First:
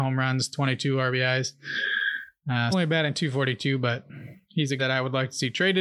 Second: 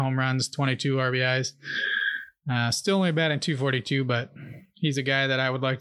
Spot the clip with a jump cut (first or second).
first